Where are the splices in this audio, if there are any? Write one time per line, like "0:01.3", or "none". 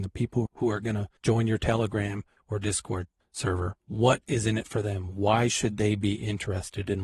0:01.2
0:03.8